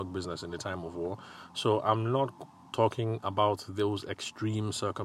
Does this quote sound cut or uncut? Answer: uncut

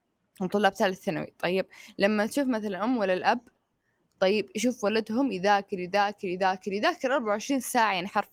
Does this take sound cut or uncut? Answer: uncut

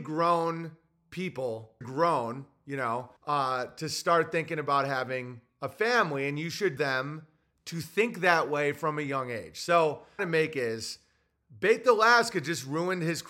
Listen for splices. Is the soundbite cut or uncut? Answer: cut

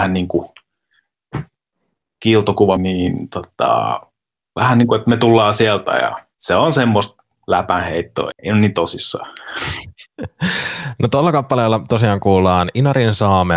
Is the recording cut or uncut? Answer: cut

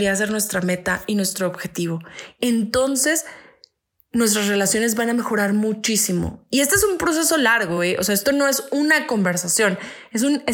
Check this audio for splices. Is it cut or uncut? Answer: uncut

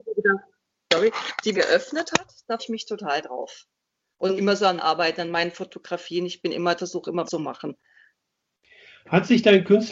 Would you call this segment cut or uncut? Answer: cut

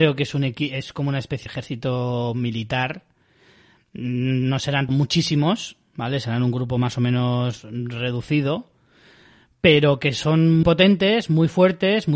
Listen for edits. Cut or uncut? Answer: cut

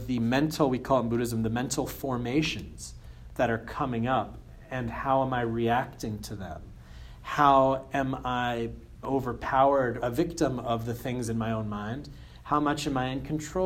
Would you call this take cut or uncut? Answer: cut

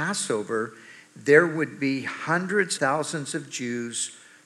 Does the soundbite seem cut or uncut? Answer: cut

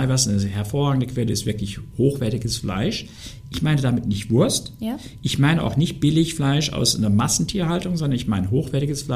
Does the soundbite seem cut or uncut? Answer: uncut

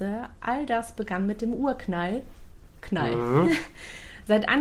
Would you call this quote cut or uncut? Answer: uncut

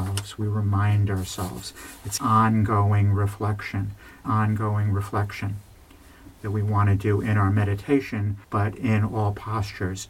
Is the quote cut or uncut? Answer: cut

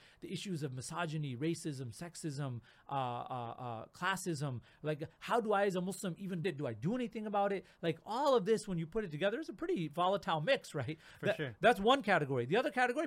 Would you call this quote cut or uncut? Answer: cut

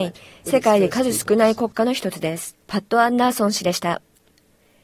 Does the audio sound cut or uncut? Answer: cut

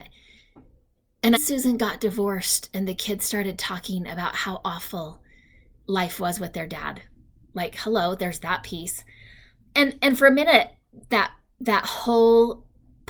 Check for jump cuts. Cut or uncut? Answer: cut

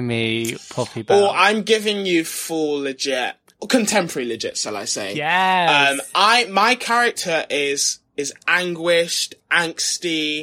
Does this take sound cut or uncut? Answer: uncut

